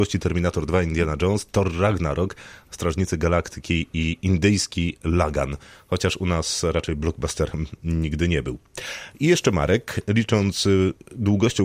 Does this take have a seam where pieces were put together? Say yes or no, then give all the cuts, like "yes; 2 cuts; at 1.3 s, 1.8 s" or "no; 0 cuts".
no; 0 cuts